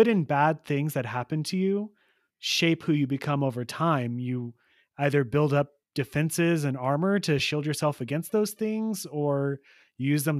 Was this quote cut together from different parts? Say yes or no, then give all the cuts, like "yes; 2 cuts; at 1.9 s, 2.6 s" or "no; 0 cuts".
no; 0 cuts